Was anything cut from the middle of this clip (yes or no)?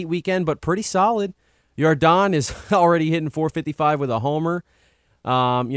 no